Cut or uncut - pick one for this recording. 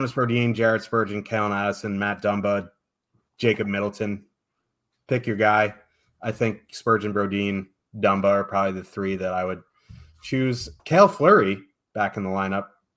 cut